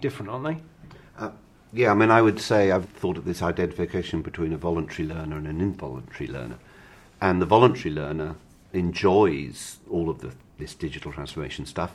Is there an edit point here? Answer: yes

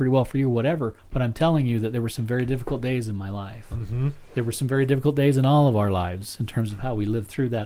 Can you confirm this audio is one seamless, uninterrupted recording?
no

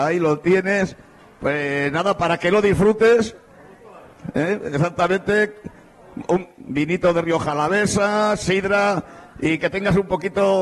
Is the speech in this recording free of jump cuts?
yes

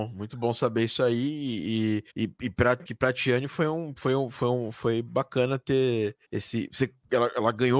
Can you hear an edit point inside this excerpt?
yes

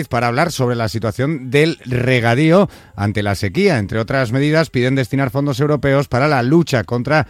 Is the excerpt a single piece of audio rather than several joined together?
yes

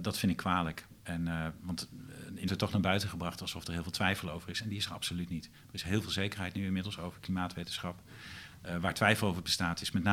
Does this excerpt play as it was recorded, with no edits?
no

